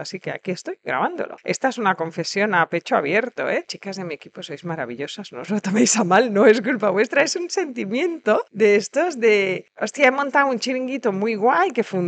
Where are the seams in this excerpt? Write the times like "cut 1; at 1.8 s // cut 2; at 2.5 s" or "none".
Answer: none